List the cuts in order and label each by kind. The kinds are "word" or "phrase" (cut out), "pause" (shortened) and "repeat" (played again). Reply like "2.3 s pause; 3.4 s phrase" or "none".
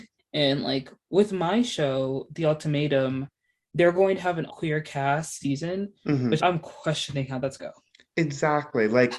4.5 s word; 5.4 s word; 6.4 s word; 7.6 s word